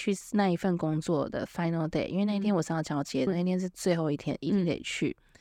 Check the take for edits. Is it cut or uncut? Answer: cut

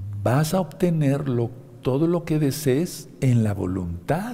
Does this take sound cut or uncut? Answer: uncut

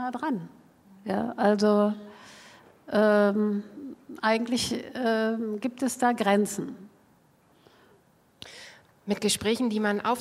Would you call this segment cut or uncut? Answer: uncut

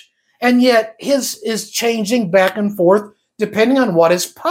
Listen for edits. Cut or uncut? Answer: uncut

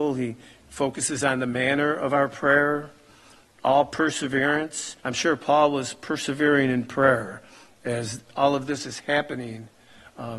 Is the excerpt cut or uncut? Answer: cut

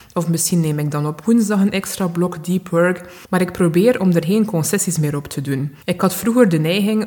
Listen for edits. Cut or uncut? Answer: cut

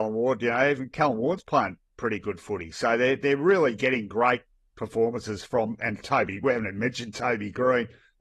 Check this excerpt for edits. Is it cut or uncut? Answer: uncut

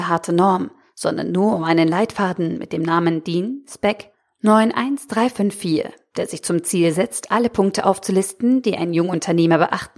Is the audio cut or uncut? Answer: uncut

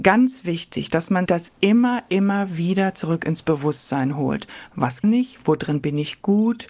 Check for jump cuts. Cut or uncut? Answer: cut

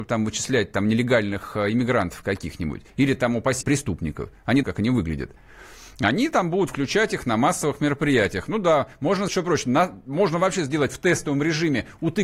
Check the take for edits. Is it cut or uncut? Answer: cut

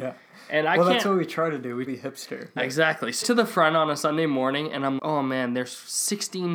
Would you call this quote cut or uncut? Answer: cut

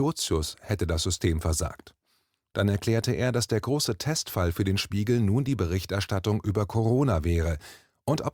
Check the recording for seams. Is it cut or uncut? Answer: uncut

